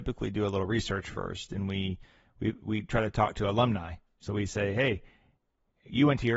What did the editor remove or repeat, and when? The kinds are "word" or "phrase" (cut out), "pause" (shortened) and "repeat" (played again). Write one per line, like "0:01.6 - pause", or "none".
none